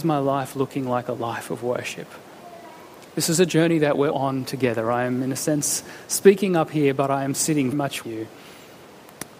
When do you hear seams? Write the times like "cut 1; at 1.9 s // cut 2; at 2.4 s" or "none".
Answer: cut 1; at 3.1 s // cut 2; at 4.1 s // cut 3; at 7.7 s // cut 4; at 8.0 s